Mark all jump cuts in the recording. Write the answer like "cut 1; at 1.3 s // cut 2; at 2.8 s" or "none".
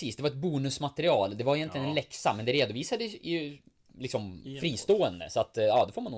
none